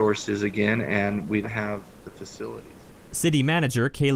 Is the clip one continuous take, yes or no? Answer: no